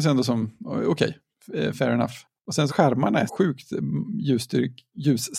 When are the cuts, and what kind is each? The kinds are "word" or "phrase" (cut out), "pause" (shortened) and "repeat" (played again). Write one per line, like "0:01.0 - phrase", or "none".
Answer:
0:02.7 - phrase
0:03.3 - word